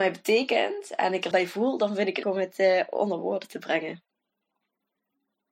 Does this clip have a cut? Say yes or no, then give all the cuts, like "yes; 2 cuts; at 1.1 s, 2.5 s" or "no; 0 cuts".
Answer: yes; 2 cuts; at 1.3 s, 2.2 s